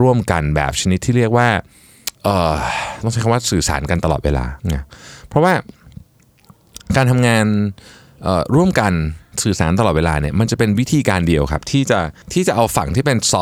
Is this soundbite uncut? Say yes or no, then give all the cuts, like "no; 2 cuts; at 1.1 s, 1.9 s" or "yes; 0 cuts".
no; 3 cuts; at 2.2 s, 4.6 s, 12.2 s